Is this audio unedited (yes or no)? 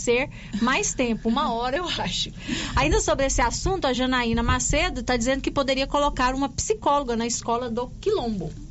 yes